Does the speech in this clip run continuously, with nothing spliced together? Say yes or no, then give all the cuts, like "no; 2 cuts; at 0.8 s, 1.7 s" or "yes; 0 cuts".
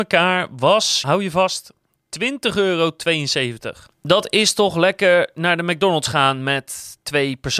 no; 1 cut; at 1.0 s